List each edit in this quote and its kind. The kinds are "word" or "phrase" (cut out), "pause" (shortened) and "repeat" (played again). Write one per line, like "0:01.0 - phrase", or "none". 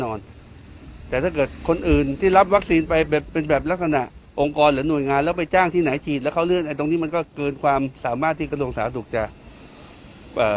0:04.2 - pause